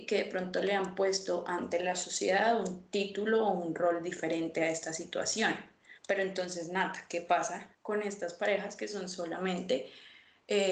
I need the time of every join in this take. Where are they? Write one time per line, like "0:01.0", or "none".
0:06.0
0:07.7